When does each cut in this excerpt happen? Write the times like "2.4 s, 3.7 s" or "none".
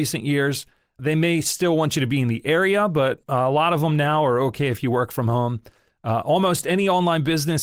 none